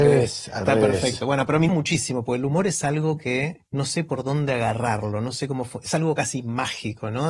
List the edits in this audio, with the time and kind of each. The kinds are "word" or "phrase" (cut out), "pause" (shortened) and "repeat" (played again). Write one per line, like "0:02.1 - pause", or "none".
0:01.7 - word
0:03.7 - pause